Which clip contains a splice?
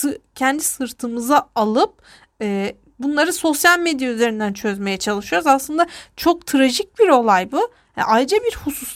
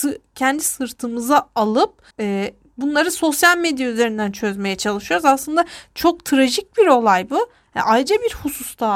second; 1 cut; at 2.1 s

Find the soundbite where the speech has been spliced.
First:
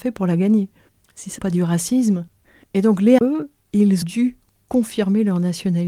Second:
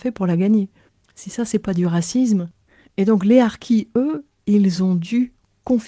first; 3 cuts; at 1.4 s, 3.2 s, 4.0 s

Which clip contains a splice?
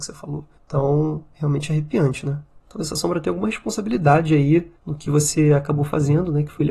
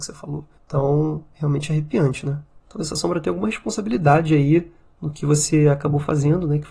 first; 1 cut; at 4.7 s

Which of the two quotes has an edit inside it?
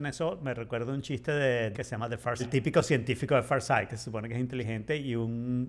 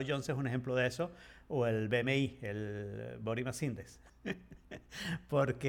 first; 2 cuts; at 1.7 s, 2.4 s

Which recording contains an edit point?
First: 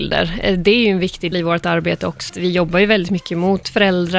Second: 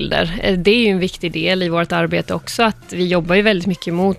first; 2 cuts; at 1.3 s, 2.3 s

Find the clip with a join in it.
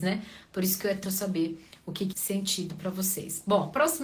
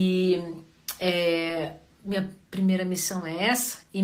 first; 2 cuts; at 1.0 s, 2.1 s

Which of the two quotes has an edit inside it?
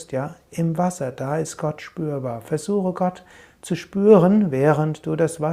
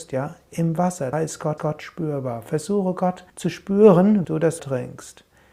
second; 5 cuts; at 1.1 s, 1.6 s, 3.3 s, 4.2 s, 4.6 s

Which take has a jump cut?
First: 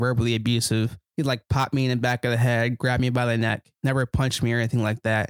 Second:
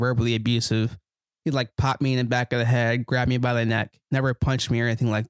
first; 1 cut; at 1.1 s

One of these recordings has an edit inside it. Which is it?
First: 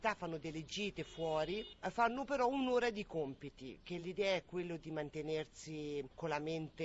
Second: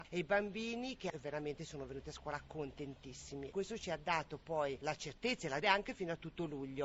second; 2 cuts; at 3.5 s, 5.6 s

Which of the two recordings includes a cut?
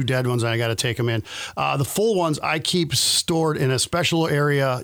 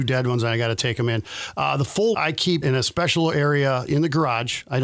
second; 3 cuts; at 2.1 s, 2.6 s, 3.9 s

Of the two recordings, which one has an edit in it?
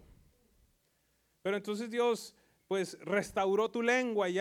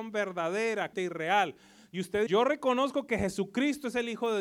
second; 2 cuts; at 0.9 s, 2.3 s

